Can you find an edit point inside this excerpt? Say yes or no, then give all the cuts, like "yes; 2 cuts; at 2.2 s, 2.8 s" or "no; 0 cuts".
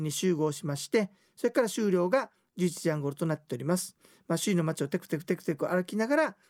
no; 0 cuts